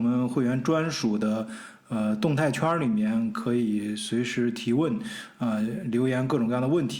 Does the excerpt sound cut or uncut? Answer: uncut